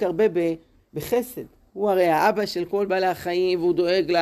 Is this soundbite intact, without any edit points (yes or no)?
yes